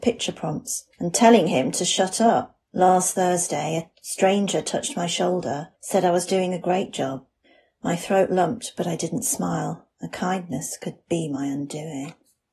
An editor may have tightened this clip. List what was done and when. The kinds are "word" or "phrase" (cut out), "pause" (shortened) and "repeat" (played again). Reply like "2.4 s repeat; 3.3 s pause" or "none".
0.9 s pause; 2.7 s pause; 5.8 s pause; 7.4 s pause; 9.9 s pause

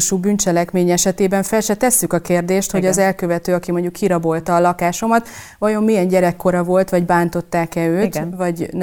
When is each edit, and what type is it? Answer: none

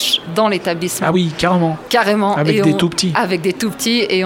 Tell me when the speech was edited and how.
none

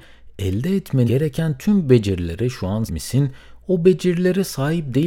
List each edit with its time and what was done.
1.1 s word; 2.9 s word

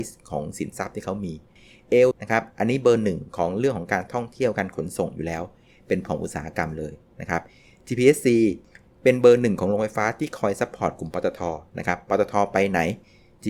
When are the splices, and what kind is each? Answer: 2.1 s word; 6.1 s word

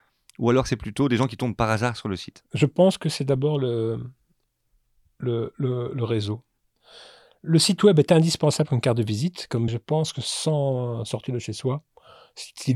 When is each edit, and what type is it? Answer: 9.7 s phrase

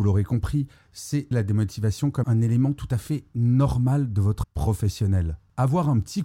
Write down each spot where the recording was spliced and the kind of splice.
1.3 s word; 2.2 s word; 4.4 s word

